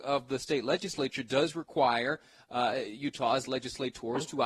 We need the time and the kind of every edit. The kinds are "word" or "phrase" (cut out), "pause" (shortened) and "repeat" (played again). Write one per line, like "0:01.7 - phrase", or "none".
none